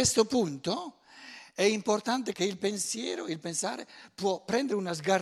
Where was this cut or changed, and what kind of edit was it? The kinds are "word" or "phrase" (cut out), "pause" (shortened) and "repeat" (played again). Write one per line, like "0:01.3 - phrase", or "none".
0:02.3 - word